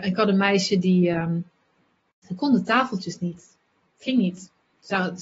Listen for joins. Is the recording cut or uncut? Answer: uncut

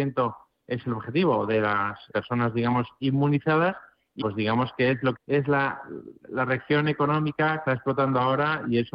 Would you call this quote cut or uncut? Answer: cut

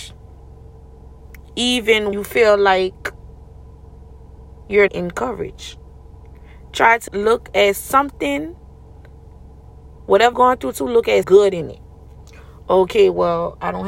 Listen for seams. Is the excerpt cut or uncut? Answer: cut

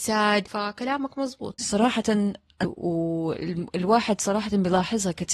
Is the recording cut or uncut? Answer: cut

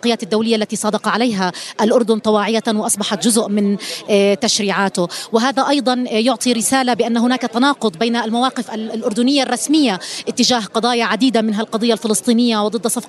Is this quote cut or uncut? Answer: uncut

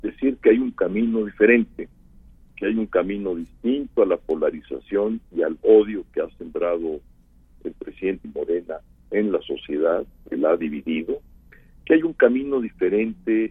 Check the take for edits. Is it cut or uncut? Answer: cut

